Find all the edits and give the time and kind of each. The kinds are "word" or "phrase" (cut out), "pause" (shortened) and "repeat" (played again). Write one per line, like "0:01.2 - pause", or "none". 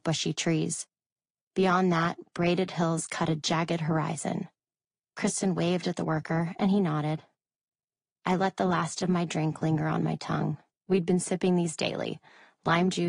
0:10.8 - pause